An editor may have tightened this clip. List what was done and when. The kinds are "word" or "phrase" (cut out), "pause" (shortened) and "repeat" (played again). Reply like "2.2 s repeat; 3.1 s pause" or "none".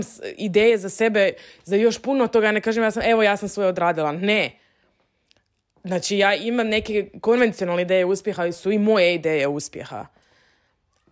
none